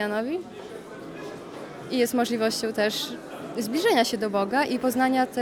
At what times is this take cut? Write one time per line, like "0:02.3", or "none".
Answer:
none

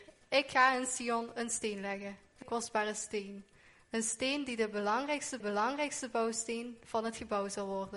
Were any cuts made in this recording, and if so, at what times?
0:02.4
0:05.4

